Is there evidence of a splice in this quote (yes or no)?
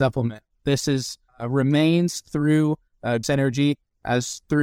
yes